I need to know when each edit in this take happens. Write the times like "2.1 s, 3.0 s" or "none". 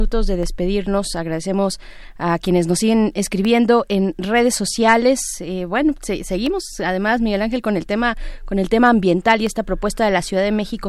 none